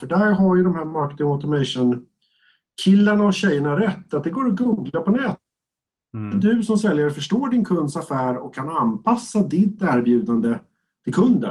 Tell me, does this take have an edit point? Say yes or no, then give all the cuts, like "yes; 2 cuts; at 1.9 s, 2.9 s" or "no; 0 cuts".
no; 0 cuts